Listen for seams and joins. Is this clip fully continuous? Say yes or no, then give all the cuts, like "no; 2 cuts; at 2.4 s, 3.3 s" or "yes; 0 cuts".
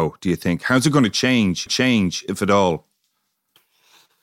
no; 1 cut; at 1.7 s